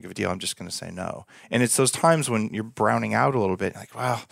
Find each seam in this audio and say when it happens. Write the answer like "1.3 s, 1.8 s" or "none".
none